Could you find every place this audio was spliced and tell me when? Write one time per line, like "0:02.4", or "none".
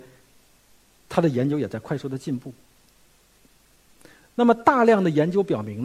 none